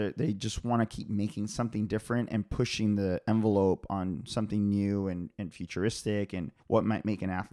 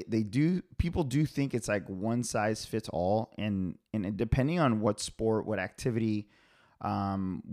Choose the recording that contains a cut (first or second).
first